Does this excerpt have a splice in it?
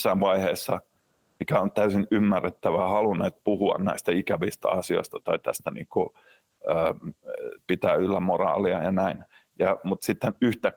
no; 0 cuts

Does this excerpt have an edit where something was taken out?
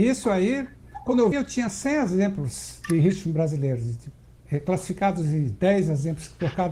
yes; 1 cut; at 1.3 s

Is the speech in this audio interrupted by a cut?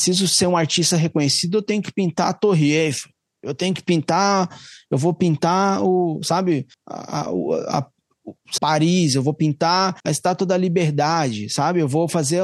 yes; 3 cuts; at 6.7 s, 8.6 s, 10.0 s

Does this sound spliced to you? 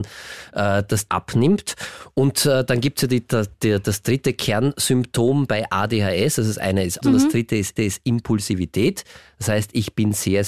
yes; 4 cuts; at 1.1 s, 3.5 s, 7.0 s, 7.8 s

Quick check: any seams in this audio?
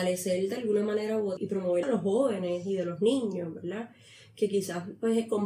yes; 2 cuts; at 1.4 s, 1.8 s

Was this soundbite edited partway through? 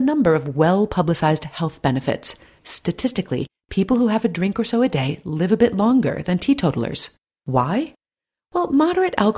no; 0 cuts

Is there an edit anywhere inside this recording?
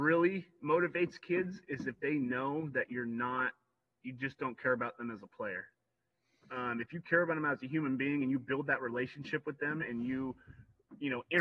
no; 0 cuts

